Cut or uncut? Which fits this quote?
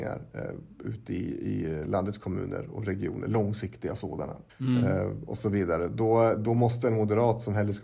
cut